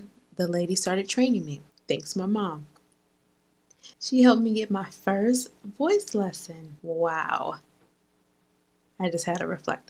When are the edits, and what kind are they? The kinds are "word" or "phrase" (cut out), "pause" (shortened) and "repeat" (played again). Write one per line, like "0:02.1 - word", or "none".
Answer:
0:01.7 - pause
0:03.9 - pause
0:06.8 - pause